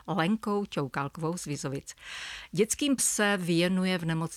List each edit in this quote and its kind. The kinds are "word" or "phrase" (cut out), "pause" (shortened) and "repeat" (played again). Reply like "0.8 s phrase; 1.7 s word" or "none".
3.0 s word